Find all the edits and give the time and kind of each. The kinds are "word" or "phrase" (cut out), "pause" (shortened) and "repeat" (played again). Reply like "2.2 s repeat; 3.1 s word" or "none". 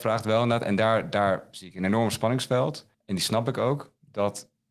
2.9 s pause